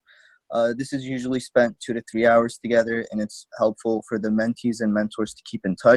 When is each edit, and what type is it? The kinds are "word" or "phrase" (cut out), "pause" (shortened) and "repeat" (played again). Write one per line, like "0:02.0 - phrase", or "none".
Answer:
0:03.5 - word

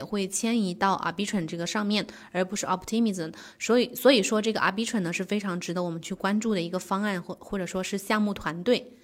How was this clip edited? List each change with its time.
none

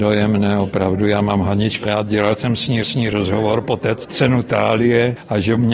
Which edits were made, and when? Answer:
0:01.8 - word
0:02.8 - repeat
0:04.0 - word

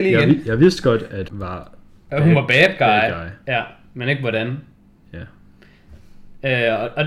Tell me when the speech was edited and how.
0:01.3 - word

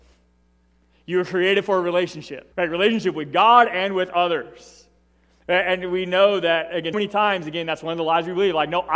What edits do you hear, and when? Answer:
0:02.5 - pause
0:06.9 - word

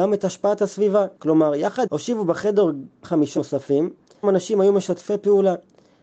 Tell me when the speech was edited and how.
0:01.2 - pause
0:01.9 - phrase
0:03.0 - word
0:03.4 - word
0:04.2 - phrase

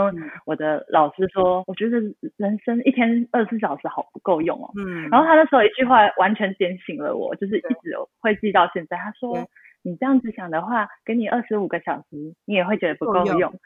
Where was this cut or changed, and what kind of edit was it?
0:01.6 - word

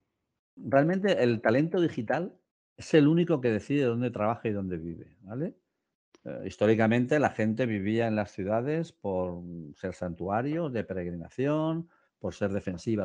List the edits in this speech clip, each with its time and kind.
none

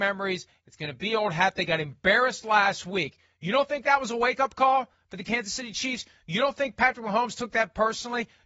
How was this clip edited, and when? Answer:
none

